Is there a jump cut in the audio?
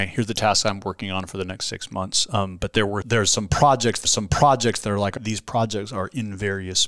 yes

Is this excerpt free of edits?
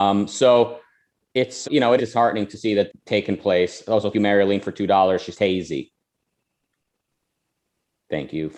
no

